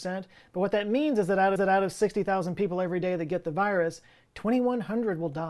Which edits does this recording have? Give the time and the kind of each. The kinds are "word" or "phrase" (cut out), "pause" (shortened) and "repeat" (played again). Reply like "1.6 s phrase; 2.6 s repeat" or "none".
1.6 s repeat